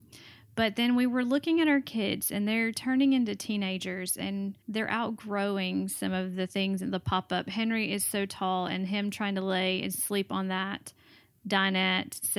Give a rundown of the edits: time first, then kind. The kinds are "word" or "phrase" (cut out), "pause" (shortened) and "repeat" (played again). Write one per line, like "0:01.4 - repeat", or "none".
0:04.6 - pause